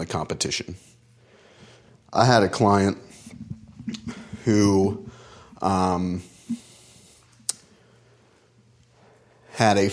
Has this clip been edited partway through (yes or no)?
no